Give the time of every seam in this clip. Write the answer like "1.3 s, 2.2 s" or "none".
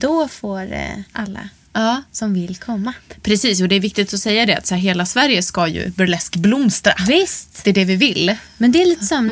1.1 s